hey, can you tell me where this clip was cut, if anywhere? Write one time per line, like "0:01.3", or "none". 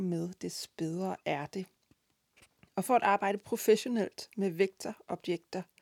none